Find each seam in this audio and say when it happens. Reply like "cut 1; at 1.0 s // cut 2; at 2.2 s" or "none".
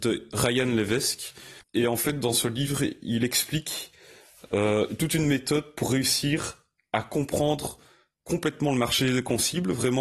none